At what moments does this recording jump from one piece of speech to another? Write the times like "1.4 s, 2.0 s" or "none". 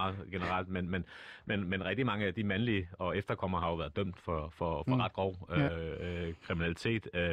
none